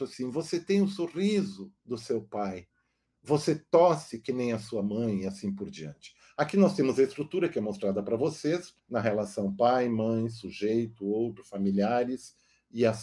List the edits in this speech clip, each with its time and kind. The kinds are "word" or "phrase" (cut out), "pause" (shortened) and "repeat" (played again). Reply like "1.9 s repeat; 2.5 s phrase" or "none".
1.8 s pause; 8.8 s pause